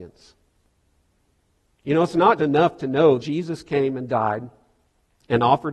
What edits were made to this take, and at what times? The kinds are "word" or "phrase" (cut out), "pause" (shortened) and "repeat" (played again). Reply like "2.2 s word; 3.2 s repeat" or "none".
2.4 s word; 3.2 s word